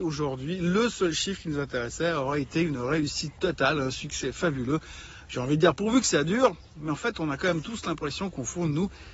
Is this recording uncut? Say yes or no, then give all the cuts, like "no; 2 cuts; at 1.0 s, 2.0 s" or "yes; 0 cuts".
no; 1 cut; at 6.7 s